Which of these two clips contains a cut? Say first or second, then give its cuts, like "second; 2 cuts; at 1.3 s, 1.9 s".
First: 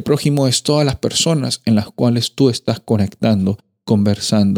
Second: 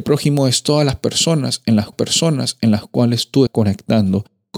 second; 2 cuts; at 1.9 s, 3.5 s